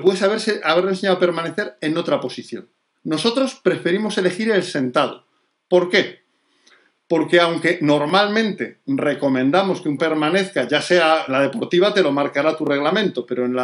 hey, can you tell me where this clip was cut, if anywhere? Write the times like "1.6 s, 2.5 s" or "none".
2.9 s, 10.0 s, 11.3 s

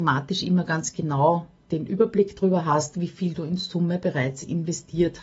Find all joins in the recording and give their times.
none

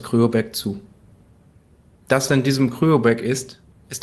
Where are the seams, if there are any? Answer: 2.3 s

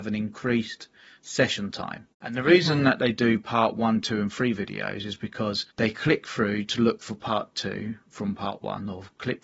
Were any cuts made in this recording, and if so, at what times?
5.7 s

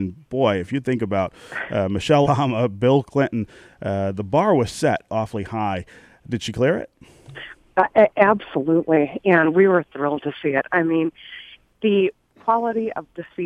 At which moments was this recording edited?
2.2 s, 5.1 s

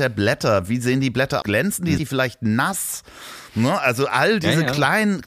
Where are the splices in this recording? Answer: 1.4 s, 2.0 s

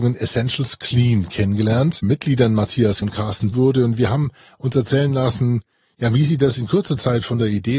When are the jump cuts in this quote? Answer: 2.0 s, 3.0 s, 3.5 s

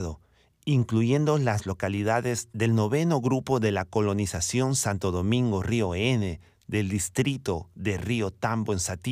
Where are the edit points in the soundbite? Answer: none

